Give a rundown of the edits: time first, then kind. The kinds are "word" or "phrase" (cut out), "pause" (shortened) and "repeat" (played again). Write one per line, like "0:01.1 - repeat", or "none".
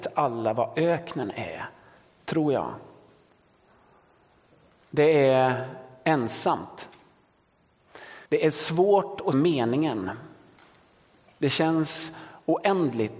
0:08.3 - pause
0:09.3 - word